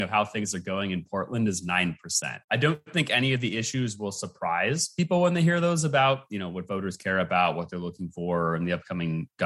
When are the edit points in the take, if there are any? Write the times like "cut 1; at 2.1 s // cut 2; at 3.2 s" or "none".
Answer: cut 1; at 2.4 s